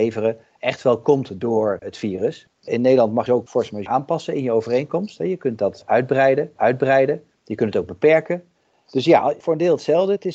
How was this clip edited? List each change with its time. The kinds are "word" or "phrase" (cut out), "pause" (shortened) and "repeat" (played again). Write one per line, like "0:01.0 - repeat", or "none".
0:03.3 - phrase
0:03.9 - word
0:06.6 - repeat